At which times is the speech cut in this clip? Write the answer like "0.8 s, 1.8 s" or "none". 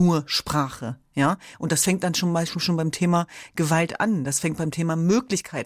none